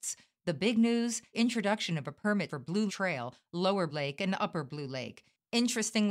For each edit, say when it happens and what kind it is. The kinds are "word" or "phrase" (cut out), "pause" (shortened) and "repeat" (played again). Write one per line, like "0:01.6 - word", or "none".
0:01.3 - word
0:02.5 - word
0:02.9 - word
0:03.9 - word